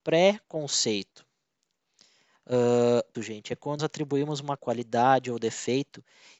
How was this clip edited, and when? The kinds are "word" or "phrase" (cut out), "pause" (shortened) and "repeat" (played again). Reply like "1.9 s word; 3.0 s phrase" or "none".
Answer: 3.1 s word; 3.8 s word; 4.6 s word